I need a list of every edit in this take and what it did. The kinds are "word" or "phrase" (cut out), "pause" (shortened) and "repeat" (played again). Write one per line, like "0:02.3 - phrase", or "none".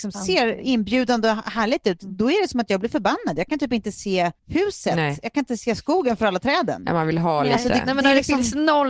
0:04.4 - pause